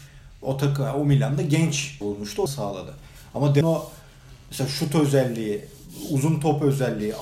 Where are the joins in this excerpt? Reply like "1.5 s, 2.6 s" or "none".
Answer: 2.0 s, 2.5 s, 3.6 s